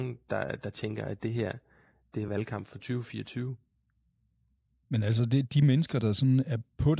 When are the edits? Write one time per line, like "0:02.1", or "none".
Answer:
none